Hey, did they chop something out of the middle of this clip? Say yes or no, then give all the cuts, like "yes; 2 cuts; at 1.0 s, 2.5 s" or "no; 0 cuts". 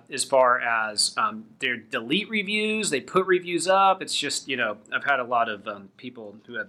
no; 0 cuts